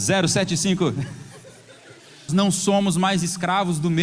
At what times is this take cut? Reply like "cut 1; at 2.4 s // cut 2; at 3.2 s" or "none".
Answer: cut 1; at 2.3 s